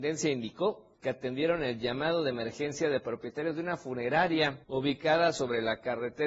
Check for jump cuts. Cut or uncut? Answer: cut